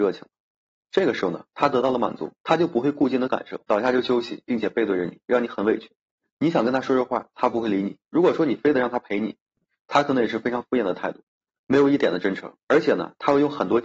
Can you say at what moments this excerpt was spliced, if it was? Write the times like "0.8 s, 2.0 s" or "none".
2.4 s, 3.6 s, 6.2 s, 8.1 s, 12.6 s